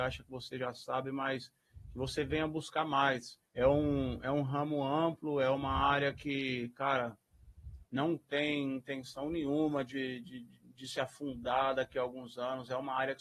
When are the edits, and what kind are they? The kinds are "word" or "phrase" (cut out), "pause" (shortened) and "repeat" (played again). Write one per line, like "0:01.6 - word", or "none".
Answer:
0:03.5 - pause
0:07.8 - pause